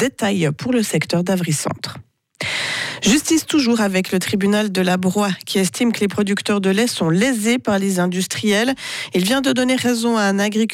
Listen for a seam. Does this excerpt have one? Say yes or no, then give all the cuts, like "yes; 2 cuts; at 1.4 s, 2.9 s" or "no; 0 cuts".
no; 0 cuts